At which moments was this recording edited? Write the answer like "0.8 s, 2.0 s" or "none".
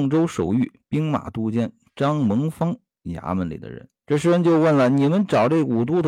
4.0 s